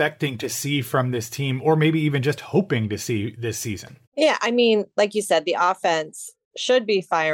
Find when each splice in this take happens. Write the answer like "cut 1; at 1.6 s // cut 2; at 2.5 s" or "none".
cut 1; at 4.1 s